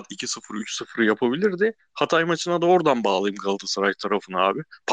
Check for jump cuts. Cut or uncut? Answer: uncut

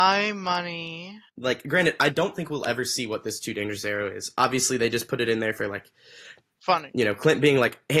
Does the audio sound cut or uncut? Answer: cut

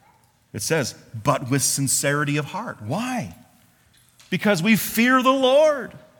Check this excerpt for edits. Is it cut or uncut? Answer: uncut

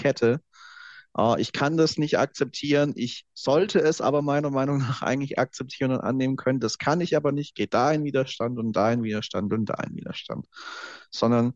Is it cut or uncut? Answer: uncut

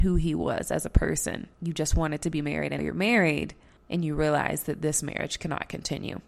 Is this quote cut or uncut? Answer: cut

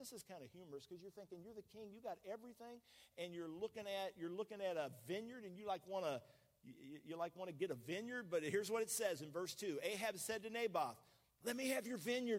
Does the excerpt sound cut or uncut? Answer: uncut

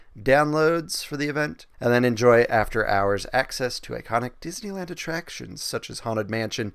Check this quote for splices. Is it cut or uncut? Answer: cut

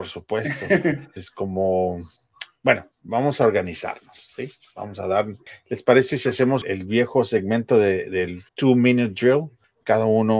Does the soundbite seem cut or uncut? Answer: cut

